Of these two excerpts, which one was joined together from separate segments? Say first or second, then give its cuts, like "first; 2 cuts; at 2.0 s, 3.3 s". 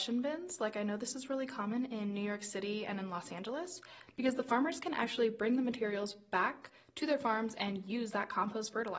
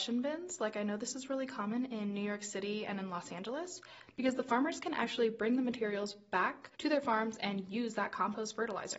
second; 1 cut; at 6.7 s